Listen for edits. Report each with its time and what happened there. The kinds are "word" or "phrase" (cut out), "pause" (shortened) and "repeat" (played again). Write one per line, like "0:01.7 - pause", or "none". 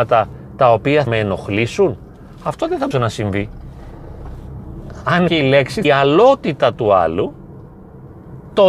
0:01.1 - word
0:02.9 - word
0:05.3 - word
0:05.8 - phrase